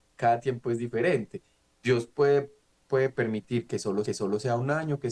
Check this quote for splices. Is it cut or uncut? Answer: cut